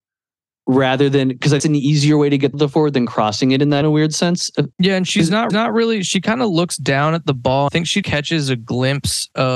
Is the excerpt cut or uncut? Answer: cut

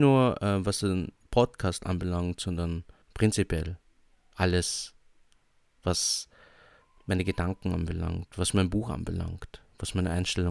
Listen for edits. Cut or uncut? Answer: cut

